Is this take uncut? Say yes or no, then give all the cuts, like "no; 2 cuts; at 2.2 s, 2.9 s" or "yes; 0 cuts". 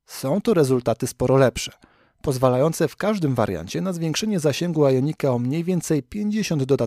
yes; 0 cuts